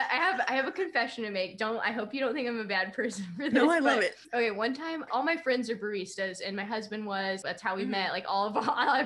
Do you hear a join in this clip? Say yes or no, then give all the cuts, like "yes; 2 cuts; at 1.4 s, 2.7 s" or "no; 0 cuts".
yes; 3 cuts; at 4.2 s, 5.1 s, 7.4 s